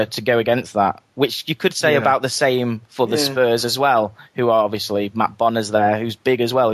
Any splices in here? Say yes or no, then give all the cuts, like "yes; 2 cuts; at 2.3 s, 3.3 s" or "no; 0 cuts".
no; 0 cuts